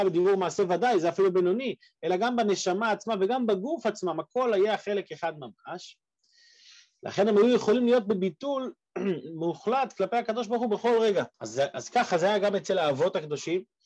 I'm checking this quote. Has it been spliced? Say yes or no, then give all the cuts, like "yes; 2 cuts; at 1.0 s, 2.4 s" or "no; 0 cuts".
yes; 1 cut; at 11.3 s